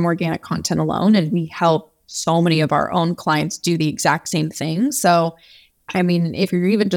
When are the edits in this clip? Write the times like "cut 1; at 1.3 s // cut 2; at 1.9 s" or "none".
none